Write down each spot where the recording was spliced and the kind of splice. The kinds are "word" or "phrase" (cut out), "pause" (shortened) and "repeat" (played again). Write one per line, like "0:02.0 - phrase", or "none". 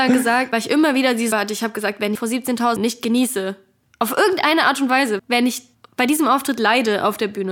0:01.3 - word
0:02.1 - phrase
0:02.8 - word
0:05.2 - word
0:05.7 - pause